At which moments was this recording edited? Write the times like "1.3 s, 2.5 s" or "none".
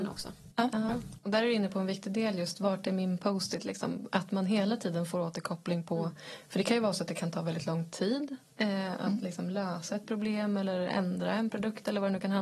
none